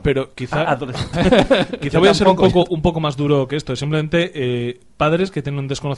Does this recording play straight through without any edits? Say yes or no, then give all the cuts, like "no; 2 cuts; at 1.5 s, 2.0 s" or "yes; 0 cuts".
no; 1 cut; at 1.1 s